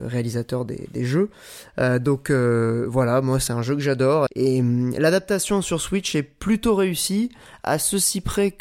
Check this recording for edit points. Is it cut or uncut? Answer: cut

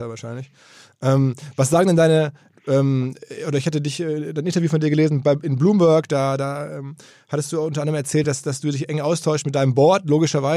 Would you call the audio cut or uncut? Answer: uncut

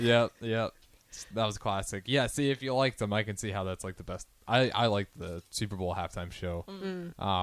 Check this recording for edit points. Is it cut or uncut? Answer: uncut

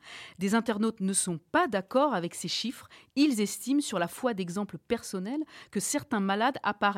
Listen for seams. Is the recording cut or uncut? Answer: uncut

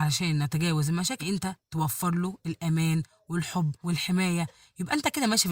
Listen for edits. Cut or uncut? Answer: cut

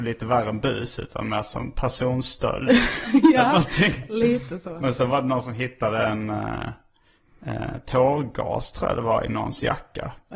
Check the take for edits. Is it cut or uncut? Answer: uncut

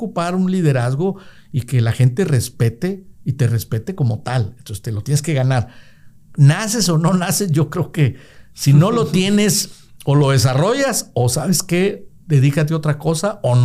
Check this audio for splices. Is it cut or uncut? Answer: cut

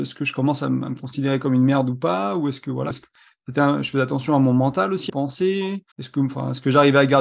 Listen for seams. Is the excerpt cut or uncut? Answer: cut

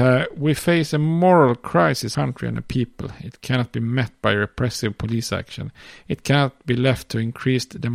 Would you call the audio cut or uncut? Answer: cut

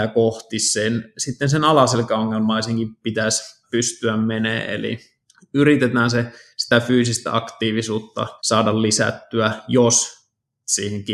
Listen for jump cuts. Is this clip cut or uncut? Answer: cut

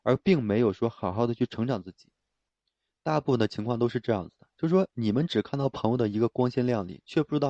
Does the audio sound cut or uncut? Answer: uncut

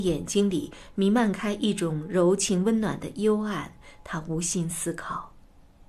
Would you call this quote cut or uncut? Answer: uncut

